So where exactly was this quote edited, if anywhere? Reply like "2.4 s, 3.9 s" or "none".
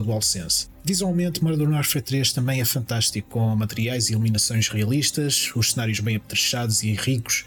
none